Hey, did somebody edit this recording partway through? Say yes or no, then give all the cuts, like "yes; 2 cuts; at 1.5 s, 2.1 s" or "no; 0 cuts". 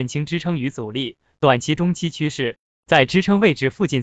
no; 0 cuts